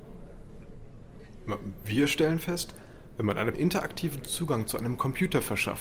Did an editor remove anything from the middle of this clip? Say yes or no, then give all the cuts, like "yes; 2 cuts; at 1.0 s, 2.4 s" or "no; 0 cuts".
yes; 1 cut; at 3.5 s